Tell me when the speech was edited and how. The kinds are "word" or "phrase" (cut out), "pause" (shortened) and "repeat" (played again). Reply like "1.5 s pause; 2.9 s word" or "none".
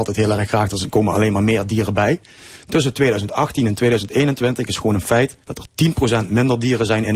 5.4 s pause